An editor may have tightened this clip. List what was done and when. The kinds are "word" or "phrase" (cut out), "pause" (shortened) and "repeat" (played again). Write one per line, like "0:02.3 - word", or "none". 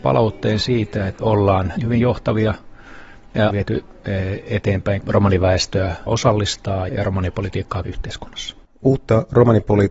0:01.2 - word
0:01.8 - word
0:03.5 - word
0:05.0 - word
0:06.1 - word
0:06.9 - word
0:07.8 - word